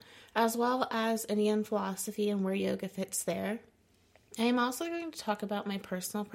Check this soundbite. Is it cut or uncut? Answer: uncut